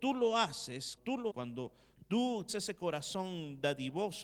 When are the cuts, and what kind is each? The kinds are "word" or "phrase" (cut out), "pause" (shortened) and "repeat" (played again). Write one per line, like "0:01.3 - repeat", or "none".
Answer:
0:01.0 - word
0:01.3 - word
0:02.5 - word